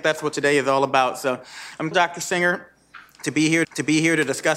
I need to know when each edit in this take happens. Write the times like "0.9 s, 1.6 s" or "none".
1.9 s, 3.6 s